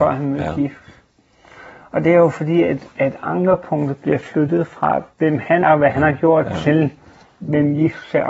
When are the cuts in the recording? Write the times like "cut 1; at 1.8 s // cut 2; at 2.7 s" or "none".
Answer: cut 1; at 5.1 s // cut 2; at 5.6 s